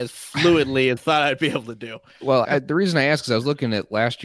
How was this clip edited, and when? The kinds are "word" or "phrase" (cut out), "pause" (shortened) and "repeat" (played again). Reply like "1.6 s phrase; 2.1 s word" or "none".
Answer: 1.0 s word; 2.4 s word